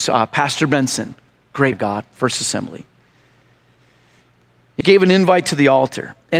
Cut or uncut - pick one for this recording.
cut